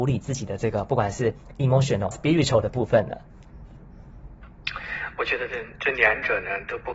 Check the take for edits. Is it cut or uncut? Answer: cut